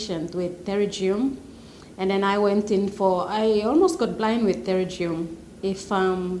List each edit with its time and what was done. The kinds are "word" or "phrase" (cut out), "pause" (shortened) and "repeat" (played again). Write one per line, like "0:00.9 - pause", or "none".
none